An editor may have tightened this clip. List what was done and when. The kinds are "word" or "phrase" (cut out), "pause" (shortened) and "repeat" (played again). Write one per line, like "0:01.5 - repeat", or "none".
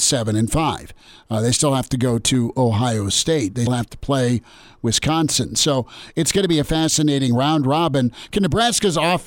0:03.7 - word